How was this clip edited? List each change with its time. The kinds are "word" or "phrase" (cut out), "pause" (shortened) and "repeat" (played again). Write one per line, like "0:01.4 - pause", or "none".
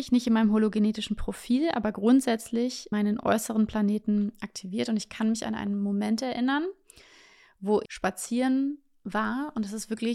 0:02.9 - word
0:07.9 - word